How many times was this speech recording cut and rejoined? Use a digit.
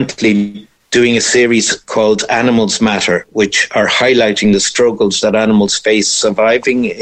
0